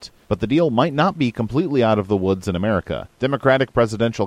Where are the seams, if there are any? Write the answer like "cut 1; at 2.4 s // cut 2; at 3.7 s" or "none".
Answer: cut 1; at 3.1 s